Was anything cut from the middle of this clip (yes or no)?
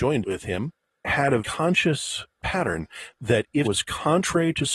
yes